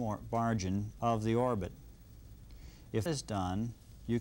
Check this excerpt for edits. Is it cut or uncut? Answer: cut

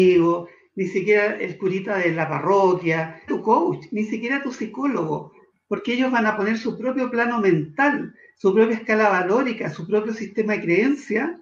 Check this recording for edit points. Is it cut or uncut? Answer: cut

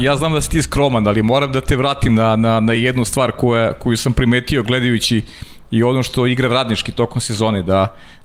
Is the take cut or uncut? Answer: uncut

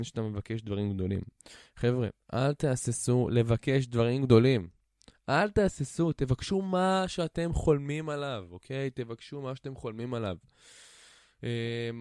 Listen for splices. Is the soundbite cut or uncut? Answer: uncut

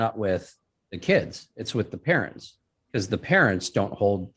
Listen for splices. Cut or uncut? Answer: cut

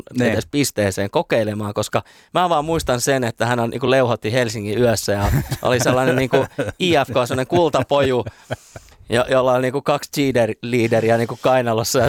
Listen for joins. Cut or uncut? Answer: uncut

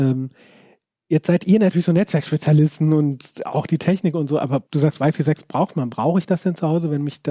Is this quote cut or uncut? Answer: cut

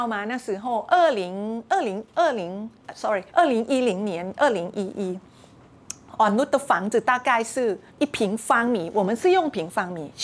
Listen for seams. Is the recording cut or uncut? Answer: cut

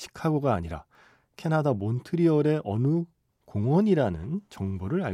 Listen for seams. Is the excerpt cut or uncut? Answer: uncut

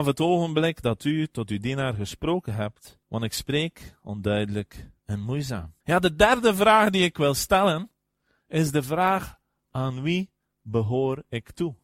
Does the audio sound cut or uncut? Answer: cut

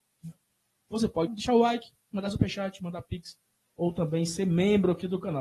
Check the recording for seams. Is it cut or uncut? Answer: cut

